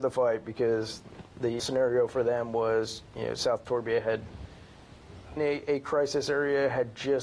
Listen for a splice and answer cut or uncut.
cut